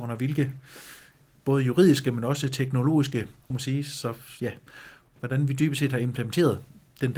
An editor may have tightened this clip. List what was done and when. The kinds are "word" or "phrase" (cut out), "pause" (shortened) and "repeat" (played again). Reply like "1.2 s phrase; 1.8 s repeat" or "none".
3.5 s phrase